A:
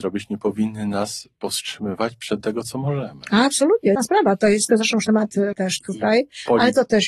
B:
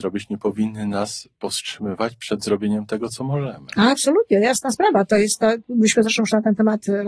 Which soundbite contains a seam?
A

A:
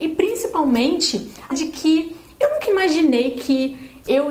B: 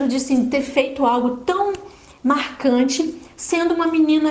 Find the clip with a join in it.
A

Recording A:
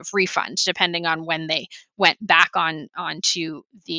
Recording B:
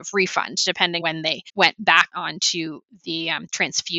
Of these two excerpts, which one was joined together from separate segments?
B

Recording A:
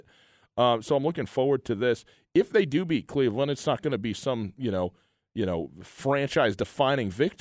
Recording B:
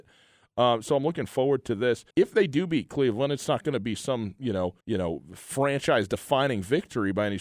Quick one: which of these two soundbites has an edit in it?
B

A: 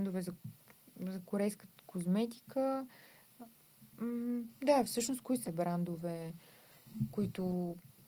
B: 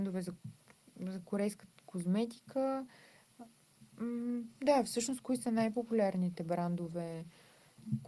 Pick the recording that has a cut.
A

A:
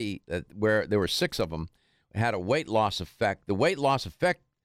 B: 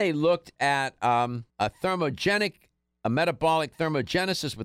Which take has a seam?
B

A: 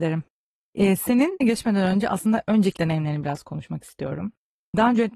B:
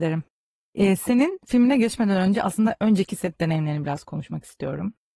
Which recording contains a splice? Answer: A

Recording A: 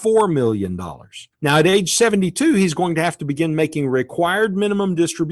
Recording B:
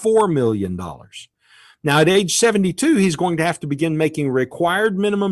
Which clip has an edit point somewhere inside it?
A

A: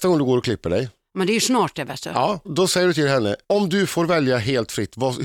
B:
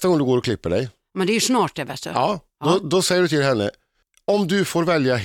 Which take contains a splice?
A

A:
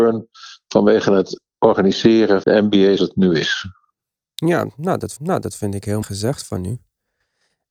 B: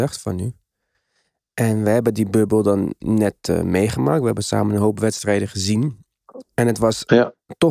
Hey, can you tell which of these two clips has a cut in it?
A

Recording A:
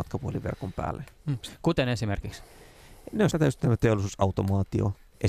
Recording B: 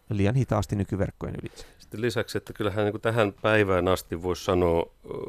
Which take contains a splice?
A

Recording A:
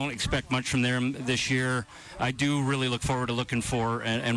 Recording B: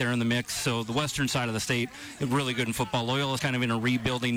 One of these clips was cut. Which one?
B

